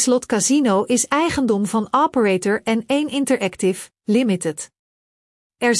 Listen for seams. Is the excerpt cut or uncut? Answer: uncut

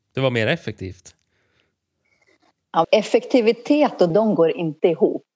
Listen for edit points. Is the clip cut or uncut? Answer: cut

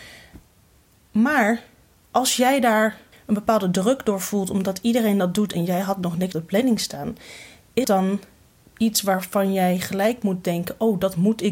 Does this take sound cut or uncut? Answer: cut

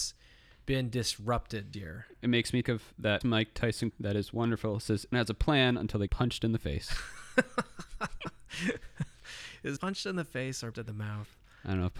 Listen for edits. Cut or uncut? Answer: cut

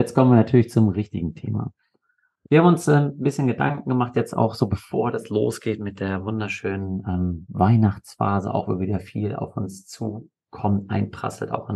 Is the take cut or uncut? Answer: uncut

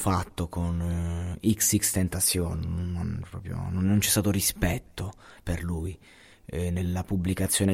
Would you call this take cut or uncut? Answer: uncut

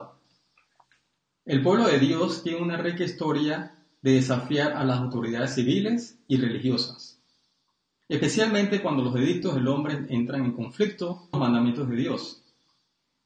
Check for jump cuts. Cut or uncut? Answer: cut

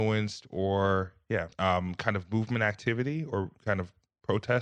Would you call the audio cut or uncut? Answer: cut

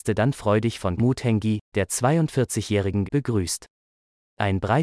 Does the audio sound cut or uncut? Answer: cut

